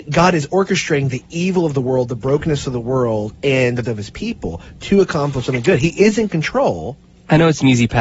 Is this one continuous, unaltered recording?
no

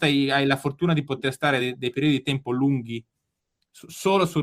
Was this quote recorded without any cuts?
yes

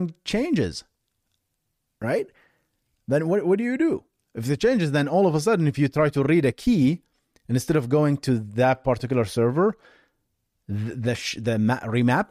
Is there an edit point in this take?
no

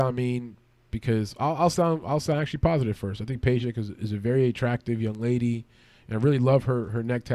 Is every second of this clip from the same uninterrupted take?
yes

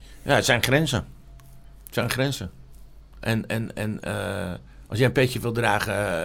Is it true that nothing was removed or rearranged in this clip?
yes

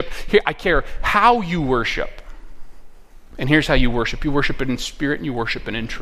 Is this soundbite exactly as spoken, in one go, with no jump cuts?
yes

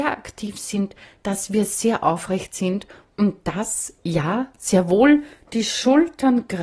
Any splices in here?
no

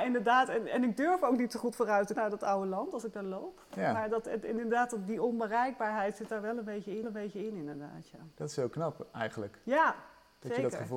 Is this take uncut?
no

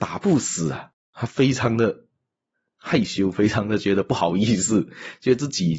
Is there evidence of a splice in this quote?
no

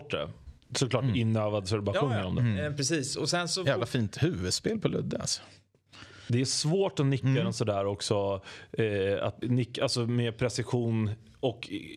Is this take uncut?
no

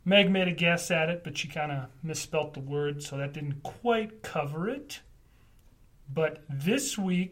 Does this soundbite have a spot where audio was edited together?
no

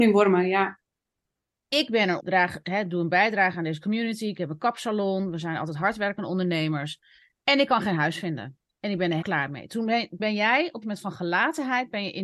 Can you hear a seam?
yes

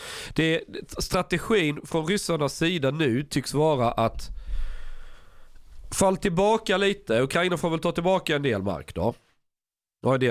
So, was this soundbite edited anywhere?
no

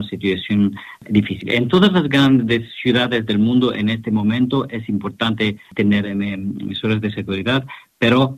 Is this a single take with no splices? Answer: yes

